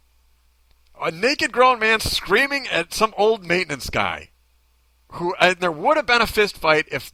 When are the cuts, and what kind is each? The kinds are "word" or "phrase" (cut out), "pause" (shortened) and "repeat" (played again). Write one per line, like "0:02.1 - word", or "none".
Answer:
0:05.6 - word